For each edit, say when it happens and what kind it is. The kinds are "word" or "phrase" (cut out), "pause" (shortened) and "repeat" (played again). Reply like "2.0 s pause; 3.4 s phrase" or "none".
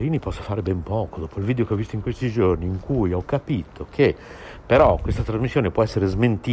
none